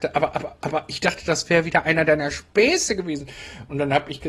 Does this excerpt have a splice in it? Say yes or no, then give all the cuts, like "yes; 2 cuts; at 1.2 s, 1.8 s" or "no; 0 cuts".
no; 0 cuts